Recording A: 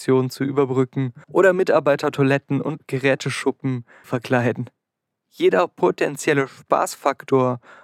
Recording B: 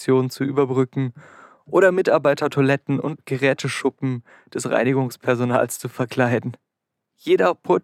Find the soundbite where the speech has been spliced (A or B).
A